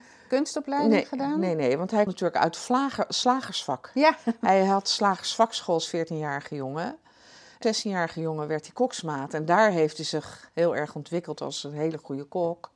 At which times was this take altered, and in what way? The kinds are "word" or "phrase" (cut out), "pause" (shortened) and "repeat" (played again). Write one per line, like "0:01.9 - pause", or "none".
0:02.1 - word
0:07.6 - word